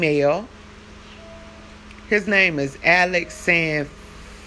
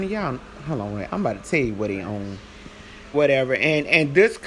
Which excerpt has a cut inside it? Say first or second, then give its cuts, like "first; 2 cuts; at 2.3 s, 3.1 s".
second; 1 cut; at 3.1 s